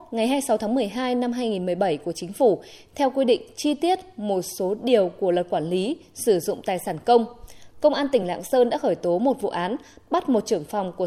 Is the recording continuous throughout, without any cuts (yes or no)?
yes